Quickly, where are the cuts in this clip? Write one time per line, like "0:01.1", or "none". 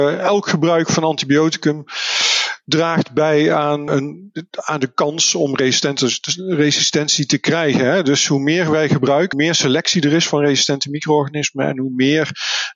0:03.9
0:09.3